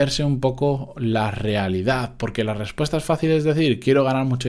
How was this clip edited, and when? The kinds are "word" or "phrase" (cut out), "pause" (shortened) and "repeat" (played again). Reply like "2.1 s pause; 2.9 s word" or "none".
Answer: none